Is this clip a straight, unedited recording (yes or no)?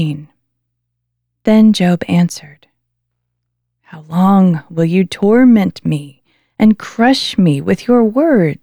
yes